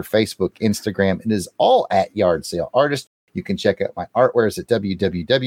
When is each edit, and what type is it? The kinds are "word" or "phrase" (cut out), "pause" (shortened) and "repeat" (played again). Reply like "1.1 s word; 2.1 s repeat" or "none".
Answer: none

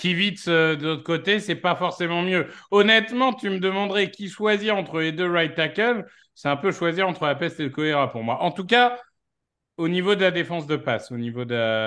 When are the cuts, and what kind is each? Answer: none

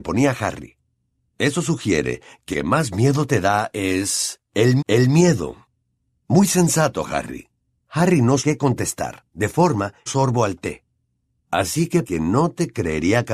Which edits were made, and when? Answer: 2.5 s word; 4.8 s repeat; 8.4 s word; 9.3 s pause; 10.1 s phrase; 12.0 s word

